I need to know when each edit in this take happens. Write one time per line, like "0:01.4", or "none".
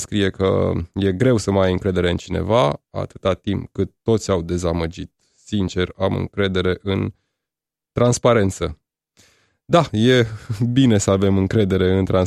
none